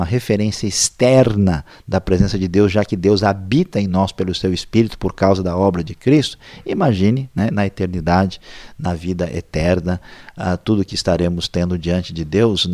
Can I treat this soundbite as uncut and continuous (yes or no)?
yes